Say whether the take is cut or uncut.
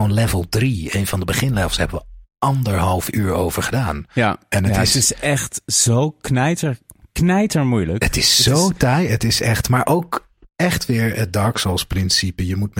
uncut